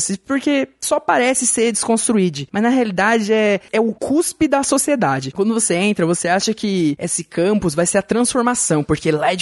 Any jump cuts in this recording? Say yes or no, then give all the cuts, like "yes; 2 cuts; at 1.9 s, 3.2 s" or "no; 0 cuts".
no; 0 cuts